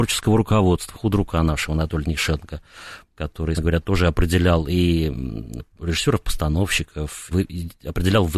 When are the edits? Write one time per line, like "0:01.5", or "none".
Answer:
0:00.9
0:03.6
0:07.3